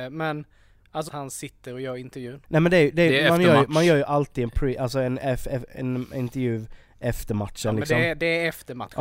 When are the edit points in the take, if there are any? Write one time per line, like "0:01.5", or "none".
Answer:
0:01.1
0:02.4